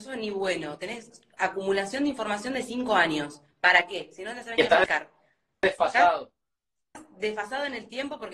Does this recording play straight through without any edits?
yes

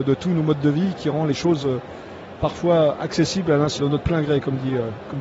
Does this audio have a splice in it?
yes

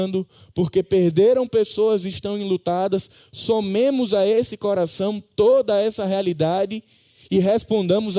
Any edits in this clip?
no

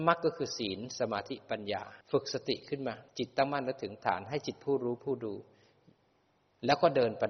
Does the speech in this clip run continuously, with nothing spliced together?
no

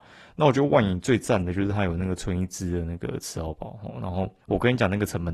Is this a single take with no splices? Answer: no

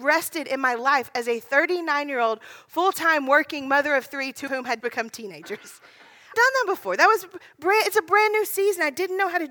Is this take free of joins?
no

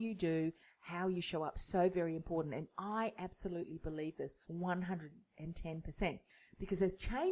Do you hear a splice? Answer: yes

